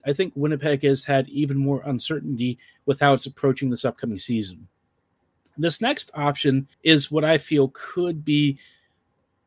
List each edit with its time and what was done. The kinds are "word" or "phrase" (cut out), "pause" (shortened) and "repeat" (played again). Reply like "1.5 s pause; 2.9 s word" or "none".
6.7 s pause